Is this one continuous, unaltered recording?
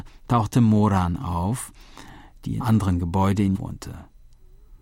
no; 2 cuts; at 2.6 s, 3.5 s

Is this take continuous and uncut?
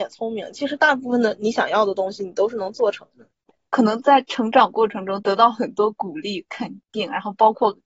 yes; 0 cuts

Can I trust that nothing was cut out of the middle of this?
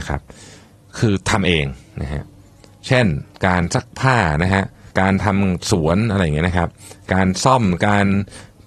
no; 1 cut; at 4.9 s

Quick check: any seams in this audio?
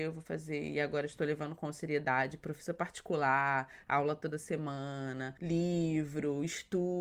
no; 0 cuts

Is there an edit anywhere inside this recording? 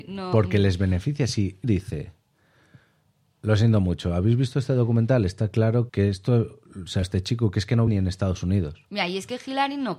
yes; 4 cuts; at 1.6 s, 5.9 s, 7.0 s, 7.9 s

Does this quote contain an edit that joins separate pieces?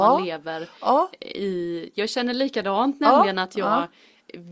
no; 0 cuts

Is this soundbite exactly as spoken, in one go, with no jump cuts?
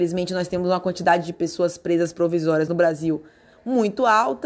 yes; 0 cuts

